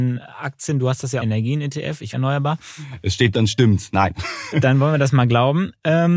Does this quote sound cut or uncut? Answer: cut